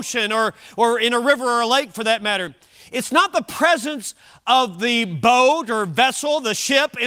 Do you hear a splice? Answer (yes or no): no